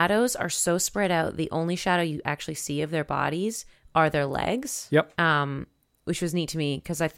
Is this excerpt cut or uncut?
cut